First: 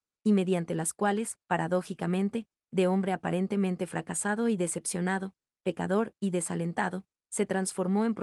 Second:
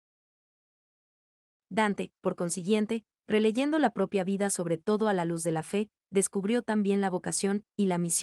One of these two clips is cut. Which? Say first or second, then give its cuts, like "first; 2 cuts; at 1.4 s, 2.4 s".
first; 1 cut; at 1.4 s